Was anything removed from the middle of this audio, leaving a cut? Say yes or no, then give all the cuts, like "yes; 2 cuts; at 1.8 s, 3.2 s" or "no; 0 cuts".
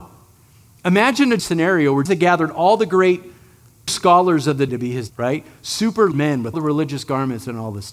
yes; 7 cuts; at 1.4 s, 2.1 s, 3.9 s, 4.7 s, 5.1 s, 6.1 s, 6.5 s